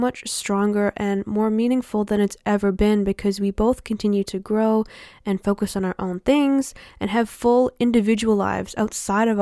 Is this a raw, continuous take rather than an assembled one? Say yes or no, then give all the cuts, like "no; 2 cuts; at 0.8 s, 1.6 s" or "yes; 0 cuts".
yes; 0 cuts